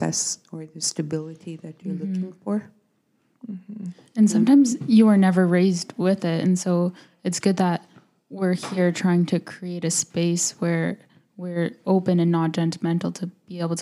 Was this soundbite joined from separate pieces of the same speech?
no; 0 cuts

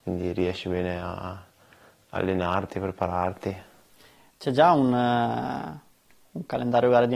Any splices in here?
no; 0 cuts

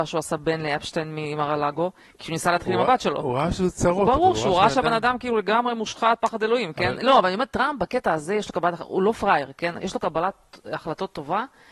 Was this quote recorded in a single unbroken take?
yes; 0 cuts

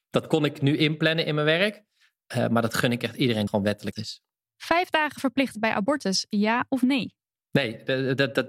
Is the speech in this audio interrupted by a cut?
yes; 3 cuts; at 3.5 s, 3.9 s, 5.6 s

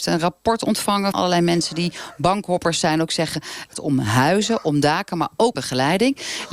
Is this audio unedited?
no; 3 cuts; at 1.1 s, 3.7 s, 5.5 s

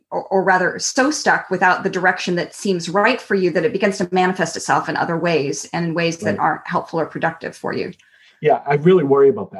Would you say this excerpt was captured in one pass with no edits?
yes; 0 cuts

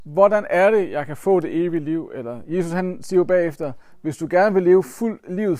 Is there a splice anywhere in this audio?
no; 0 cuts

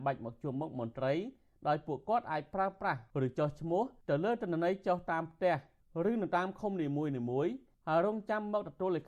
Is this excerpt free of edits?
yes; 0 cuts

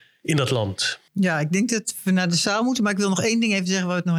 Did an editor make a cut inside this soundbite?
yes; 1 cut; at 1.1 s

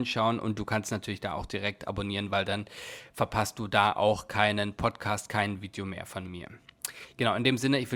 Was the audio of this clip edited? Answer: no; 0 cuts

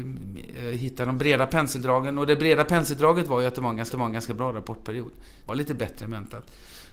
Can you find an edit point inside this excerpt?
yes; 2 cuts; at 3.9 s, 5.5 s

